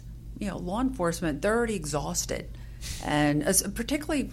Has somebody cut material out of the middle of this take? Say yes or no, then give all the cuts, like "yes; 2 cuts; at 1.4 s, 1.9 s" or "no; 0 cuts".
no; 0 cuts